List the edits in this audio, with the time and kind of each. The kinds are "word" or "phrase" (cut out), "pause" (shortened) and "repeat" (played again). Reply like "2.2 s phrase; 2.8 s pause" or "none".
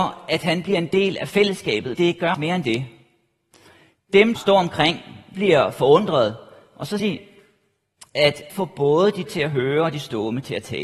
1.9 s word; 2.3 s word; 4.4 s word; 5.3 s word; 7.0 s word; 8.5 s word; 9.3 s word